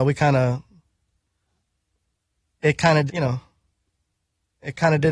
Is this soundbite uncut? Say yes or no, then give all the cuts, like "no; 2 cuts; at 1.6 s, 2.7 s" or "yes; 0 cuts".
no; 1 cut; at 3.1 s